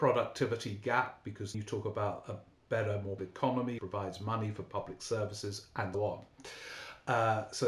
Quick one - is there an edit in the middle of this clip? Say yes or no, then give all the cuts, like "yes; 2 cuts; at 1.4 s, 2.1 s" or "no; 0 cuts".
yes; 4 cuts; at 1.5 s, 3.2 s, 3.8 s, 5.9 s